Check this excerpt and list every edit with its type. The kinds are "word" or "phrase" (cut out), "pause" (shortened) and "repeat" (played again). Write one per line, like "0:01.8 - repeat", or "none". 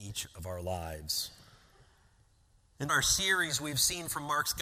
0:02.9 - word